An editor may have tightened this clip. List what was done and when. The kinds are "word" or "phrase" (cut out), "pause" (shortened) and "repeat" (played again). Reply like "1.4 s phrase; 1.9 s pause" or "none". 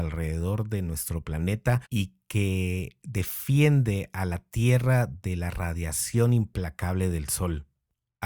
1.8 s pause